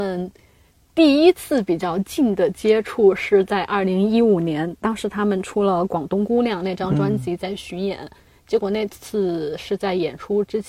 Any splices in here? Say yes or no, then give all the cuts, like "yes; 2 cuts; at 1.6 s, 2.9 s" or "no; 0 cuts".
no; 0 cuts